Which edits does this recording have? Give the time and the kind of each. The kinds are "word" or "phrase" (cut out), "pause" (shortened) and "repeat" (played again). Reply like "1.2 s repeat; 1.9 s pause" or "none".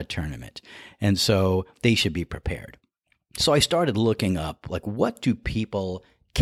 none